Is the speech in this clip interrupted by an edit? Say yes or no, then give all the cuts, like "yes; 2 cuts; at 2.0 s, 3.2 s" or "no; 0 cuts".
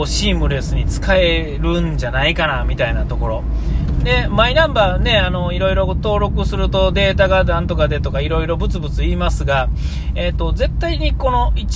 no; 0 cuts